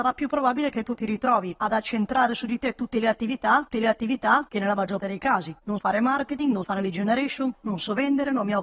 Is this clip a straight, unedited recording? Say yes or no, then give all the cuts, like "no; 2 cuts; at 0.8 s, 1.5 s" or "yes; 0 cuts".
no; 5 cuts; at 3.7 s, 5.0 s, 5.8 s, 6.6 s, 7.5 s